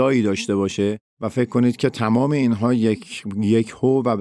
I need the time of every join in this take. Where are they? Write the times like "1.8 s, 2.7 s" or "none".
1.1 s